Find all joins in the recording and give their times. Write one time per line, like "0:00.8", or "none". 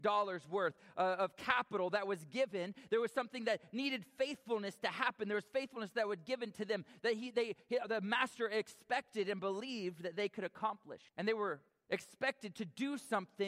0:11.1
0:11.7